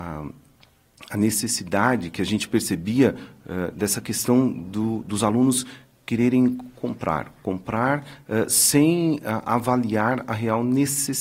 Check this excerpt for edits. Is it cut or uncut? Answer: uncut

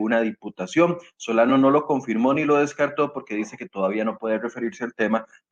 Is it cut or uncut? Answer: uncut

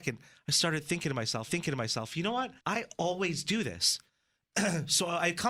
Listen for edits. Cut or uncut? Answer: cut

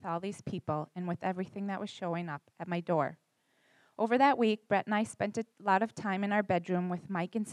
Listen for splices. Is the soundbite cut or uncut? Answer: uncut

